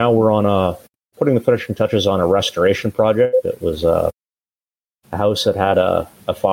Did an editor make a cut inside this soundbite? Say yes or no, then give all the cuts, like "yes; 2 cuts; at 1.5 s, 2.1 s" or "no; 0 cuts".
no; 0 cuts